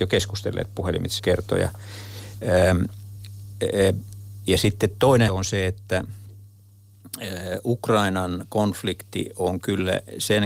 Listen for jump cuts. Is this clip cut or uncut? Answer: cut